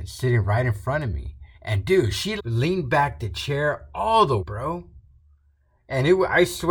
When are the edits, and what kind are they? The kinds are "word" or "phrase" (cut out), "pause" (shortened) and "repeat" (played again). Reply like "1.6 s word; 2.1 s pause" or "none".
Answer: 1.5 s pause; 2.4 s word; 4.4 s word